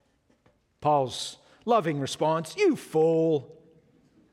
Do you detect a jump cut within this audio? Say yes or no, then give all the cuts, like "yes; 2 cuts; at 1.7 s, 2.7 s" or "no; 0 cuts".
no; 0 cuts